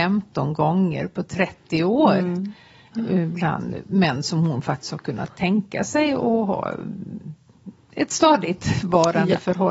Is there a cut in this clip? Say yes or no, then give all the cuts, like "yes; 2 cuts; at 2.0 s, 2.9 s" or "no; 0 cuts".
no; 0 cuts